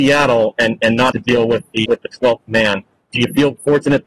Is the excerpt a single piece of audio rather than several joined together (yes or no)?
no